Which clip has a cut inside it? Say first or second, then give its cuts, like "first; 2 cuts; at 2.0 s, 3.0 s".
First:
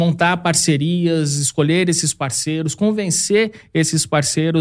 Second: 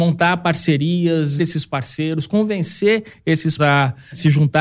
second; 2 cuts; at 1.4 s, 3.6 s